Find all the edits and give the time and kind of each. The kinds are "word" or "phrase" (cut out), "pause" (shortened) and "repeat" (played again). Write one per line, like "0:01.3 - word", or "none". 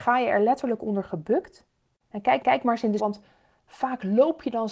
0:02.4 - repeat
0:03.0 - word